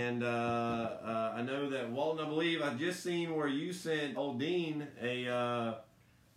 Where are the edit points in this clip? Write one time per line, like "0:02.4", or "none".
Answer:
0:04.1